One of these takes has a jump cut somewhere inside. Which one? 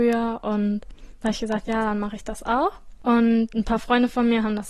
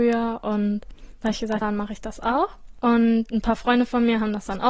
second; 1 cut; at 1.6 s

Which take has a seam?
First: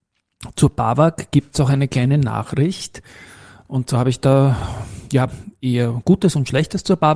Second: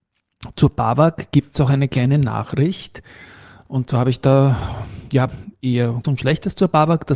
second; 1 cut; at 6.0 s

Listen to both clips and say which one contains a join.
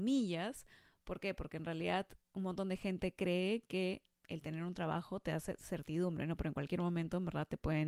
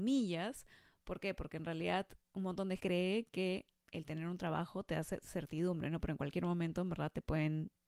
second; 1 cut; at 2.8 s

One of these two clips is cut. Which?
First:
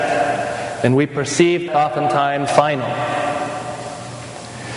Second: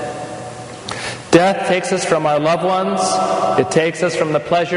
first; 2 cuts; at 1.7 s, 2.5 s

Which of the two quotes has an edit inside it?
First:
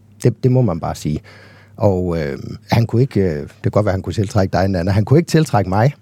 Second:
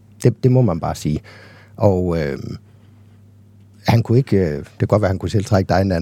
first; 1 cut; at 2.6 s

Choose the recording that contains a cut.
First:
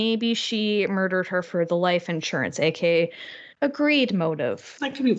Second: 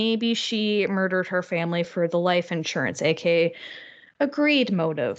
first; 2 cuts; at 1.4 s, 3.5 s

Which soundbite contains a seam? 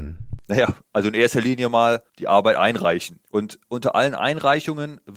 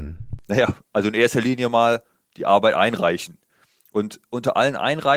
first; 2 cuts; at 2.1 s, 3.3 s

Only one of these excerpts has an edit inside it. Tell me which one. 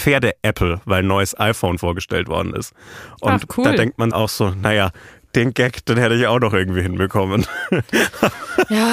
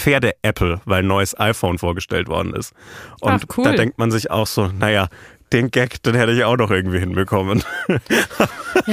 first; 1 cut; at 4.1 s

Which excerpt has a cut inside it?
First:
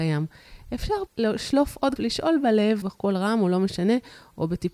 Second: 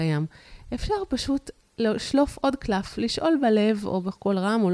first; 3 cuts; at 1.1 s, 2.0 s, 2.8 s

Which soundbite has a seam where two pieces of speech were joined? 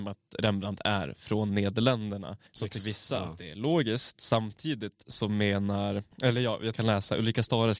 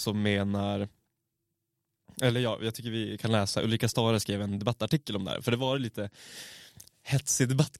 first; 4 cuts; at 2.5 s, 2.8 s, 6.1 s, 6.7 s

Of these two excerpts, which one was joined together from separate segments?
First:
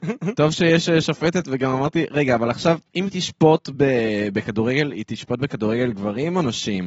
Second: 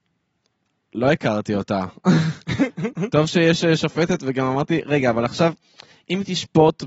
first; 1 cut; at 2.9 s

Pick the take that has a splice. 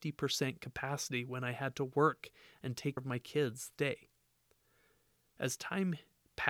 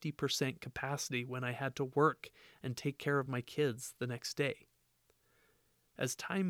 first; 2 cuts; at 3.0 s, 3.8 s

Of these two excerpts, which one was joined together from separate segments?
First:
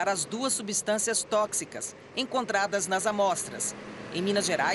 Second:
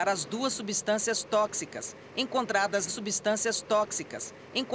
second; 1 cut; at 2.9 s

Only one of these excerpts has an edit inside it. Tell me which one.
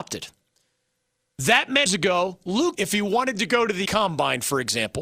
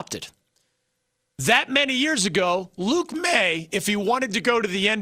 first; 3 cuts; at 1.9 s, 2.7 s, 3.9 s

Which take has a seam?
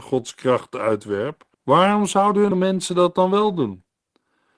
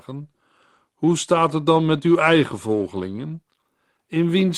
first; 2 cuts; at 1.5 s, 2.5 s

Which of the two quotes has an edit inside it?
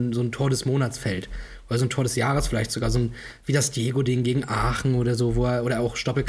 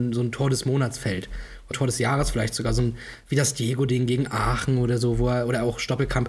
second; 1 cut; at 1.7 s

